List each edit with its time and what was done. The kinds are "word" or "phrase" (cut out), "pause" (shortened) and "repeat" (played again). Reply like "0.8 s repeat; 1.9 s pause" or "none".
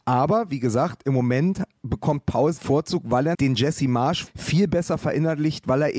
2.6 s word; 3.3 s word; 4.3 s word